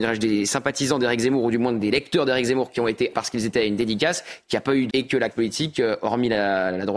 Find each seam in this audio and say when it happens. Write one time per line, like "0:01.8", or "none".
0:03.1
0:04.9
0:05.3